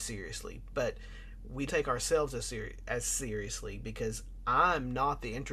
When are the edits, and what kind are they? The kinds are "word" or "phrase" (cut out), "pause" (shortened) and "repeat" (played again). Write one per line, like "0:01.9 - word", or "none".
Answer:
0:01.7 - word
0:02.4 - word